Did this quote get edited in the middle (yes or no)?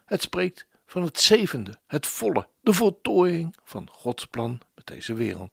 yes